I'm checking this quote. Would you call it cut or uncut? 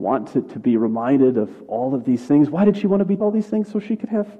cut